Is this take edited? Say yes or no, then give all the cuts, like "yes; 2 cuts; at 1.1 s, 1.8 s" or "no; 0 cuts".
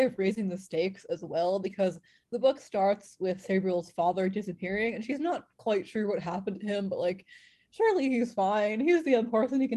no; 0 cuts